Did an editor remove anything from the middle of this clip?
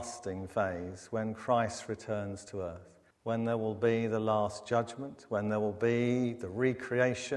yes; 1 cut; at 3.1 s

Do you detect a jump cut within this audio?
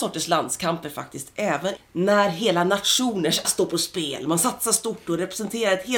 yes; 2 cuts; at 1.8 s, 3.4 s

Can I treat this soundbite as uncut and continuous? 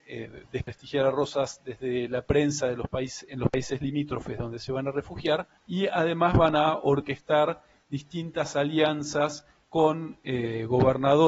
no; 1 cut; at 5.6 s

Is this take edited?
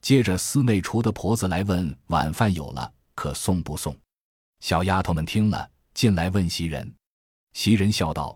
no; 0 cuts

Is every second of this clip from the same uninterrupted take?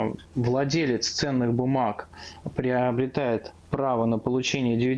yes; 0 cuts

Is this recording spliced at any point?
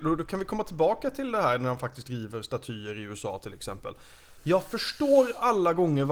no; 0 cuts

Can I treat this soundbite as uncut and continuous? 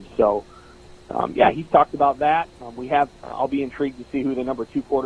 no; 2 cuts; at 2.5 s, 3.2 s

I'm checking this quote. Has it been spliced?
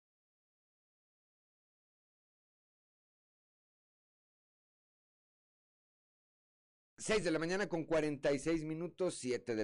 no; 0 cuts

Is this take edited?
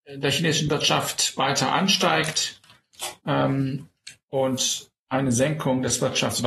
yes; 2 cuts; at 3.2 s, 5.0 s

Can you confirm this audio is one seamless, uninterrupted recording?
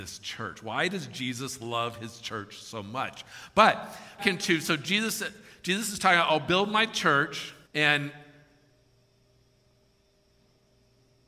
no; 2 cuts; at 4.2 s, 7.6 s

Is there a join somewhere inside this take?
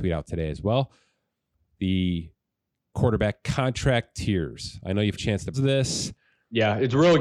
yes; 3 cuts; at 2.9 s, 5.1 s, 5.5 s

